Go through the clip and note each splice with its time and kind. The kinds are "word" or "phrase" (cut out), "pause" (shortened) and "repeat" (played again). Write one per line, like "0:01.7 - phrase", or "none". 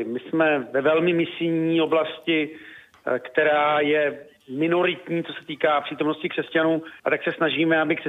0:07.0 - pause